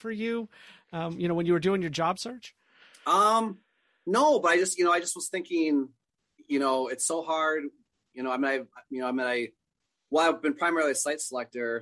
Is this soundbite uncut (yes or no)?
yes